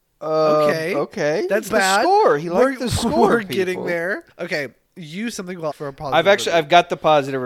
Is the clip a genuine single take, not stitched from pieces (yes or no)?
no